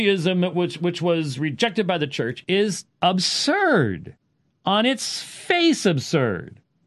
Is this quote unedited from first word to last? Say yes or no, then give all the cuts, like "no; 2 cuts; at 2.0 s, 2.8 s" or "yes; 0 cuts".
no; 1 cut; at 2.9 s